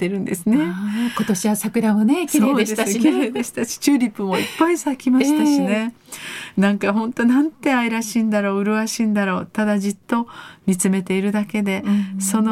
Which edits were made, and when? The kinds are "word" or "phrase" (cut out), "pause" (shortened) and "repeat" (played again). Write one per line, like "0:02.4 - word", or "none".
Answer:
none